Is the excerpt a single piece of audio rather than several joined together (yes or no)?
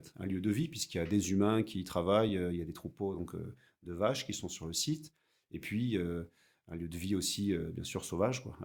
yes